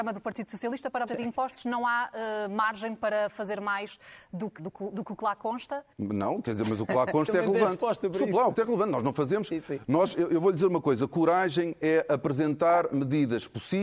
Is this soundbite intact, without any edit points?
no; 4 cuts; at 1.1 s, 4.6 s, 5.9 s, 8.5 s

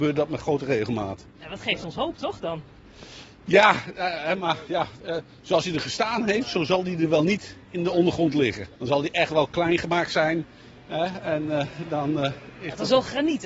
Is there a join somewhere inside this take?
yes; 1 cut; at 8.7 s

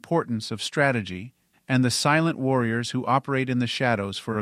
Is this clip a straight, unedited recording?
no; 1 cut; at 1.5 s

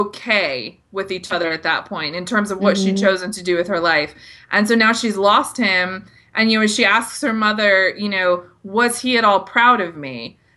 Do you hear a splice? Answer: no; 0 cuts

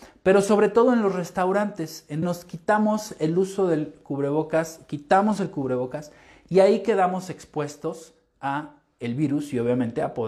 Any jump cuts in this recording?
yes; 1 cut; at 2.2 s

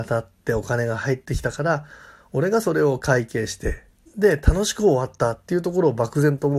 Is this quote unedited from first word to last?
yes; 0 cuts

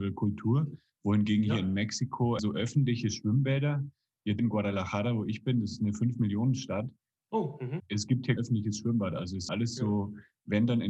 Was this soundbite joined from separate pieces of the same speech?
yes; 5 cuts; at 2.4 s, 4.4 s, 7.8 s, 8.4 s, 9.5 s

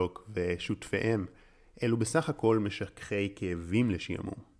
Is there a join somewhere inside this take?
no; 0 cuts

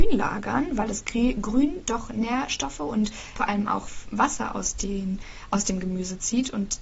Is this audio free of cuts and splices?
yes; 0 cuts

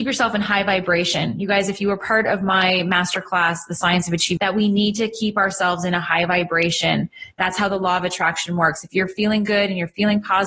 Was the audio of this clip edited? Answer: yes; 1 cut; at 4.4 s

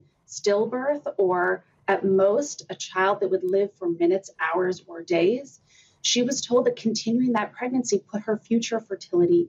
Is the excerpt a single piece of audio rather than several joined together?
yes; 0 cuts

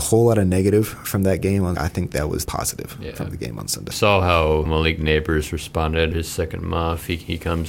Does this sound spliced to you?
yes; 5 cuts; at 1.8 s, 2.5 s, 3.9 s, 4.7 s, 6.1 s

